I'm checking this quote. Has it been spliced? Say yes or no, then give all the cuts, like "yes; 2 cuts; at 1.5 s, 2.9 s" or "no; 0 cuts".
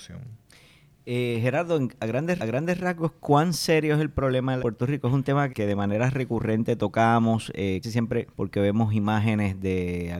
yes; 5 cuts; at 2.4 s, 4.6 s, 5.5 s, 7.8 s, 8.3 s